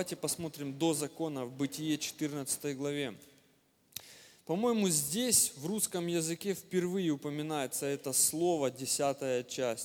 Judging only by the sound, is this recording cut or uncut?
uncut